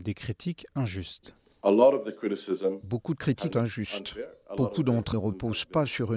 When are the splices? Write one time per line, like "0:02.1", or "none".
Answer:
0:03.5
0:05.1